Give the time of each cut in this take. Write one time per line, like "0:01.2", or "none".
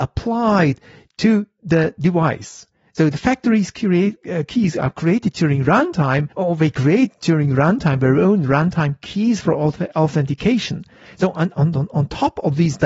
0:06.3

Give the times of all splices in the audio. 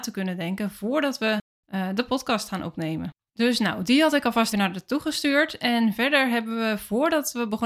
0:03.3
0:04.5

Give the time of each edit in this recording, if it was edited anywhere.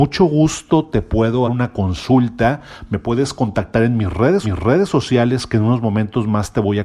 0:01.5
0:04.4

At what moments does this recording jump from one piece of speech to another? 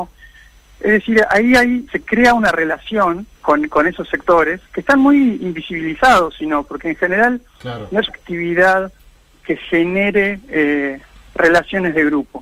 0:01.9
0:03.3
0:04.7
0:07.5
0:08.1

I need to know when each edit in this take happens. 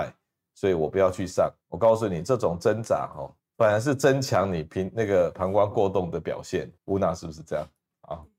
0:01.6
0:03.4
0:06.8

